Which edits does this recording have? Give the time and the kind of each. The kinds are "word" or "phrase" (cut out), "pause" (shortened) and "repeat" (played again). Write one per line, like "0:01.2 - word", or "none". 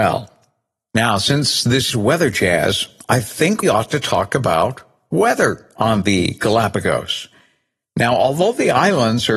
0:01.9 - word
0:03.6 - word